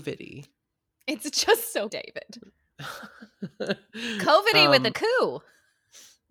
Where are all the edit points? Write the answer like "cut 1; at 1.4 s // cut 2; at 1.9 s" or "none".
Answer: cut 1; at 1.9 s // cut 2; at 4.9 s